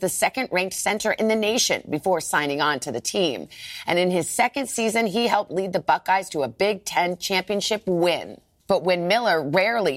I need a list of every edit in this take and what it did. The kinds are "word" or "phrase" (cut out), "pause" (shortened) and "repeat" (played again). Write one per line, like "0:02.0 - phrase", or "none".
none